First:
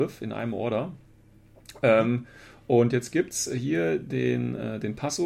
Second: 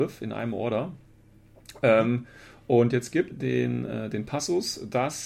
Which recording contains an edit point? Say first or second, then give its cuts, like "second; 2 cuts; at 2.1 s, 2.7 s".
second; 1 cut; at 3.3 s